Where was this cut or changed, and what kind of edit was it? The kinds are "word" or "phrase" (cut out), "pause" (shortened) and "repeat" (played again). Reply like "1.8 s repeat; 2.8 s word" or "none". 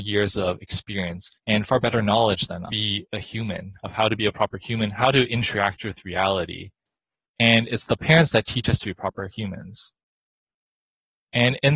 1.3 s pause; 2.7 s phrase

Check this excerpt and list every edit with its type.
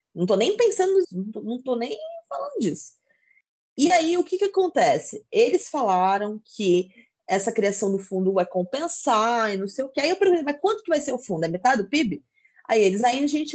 1.0 s word

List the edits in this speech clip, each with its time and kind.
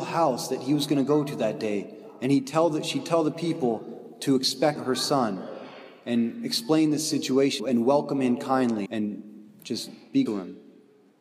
4.8 s word; 7.6 s word; 8.9 s word; 10.3 s word

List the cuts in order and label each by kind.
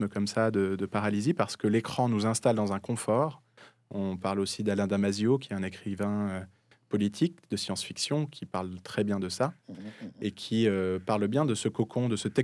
none

